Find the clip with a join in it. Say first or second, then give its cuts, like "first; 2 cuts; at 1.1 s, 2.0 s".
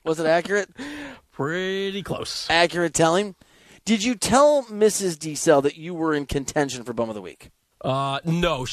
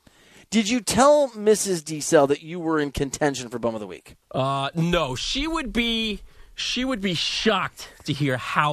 second; 1 cut; at 4.2 s